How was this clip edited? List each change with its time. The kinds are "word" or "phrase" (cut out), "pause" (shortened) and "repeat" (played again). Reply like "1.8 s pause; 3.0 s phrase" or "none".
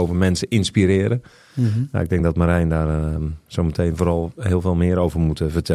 none